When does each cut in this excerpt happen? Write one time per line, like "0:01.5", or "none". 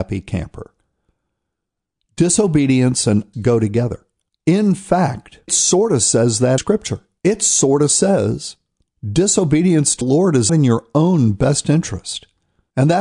0:03.3
0:05.5
0:06.6
0:09.0
0:10.0
0:10.5